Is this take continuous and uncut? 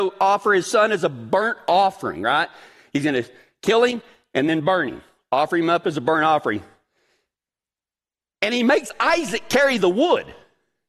yes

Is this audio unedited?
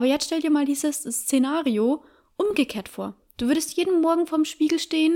yes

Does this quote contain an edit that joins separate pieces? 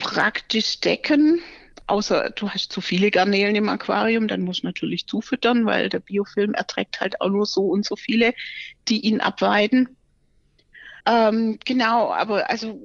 yes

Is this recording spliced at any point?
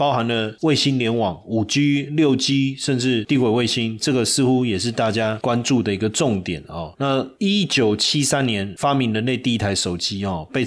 no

